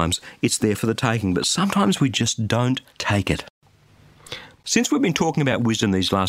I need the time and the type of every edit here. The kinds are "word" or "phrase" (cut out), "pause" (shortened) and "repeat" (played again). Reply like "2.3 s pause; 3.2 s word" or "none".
2.9 s pause